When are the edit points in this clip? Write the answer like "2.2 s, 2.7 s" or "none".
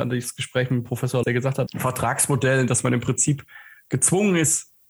1.2 s, 1.7 s